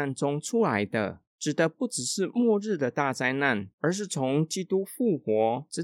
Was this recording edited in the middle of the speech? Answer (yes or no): yes